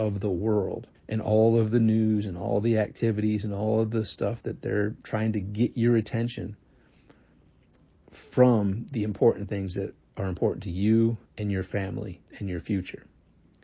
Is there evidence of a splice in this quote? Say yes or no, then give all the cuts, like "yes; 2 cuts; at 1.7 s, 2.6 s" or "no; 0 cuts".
yes; 3 cuts; at 0.9 s, 11.3 s, 12.3 s